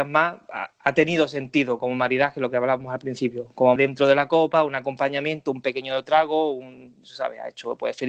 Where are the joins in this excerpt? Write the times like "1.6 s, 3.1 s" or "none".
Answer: 3.8 s